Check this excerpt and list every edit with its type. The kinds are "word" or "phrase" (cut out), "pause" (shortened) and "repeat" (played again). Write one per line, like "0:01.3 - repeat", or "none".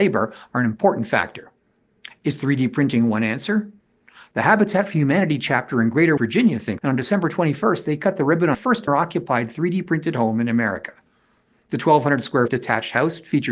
0:06.2 - word
0:06.8 - word
0:08.5 - word
0:08.9 - word
0:12.5 - word